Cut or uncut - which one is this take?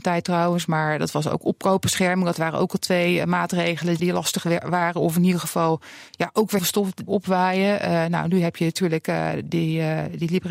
cut